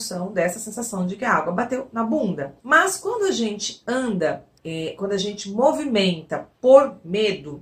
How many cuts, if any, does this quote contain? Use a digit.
2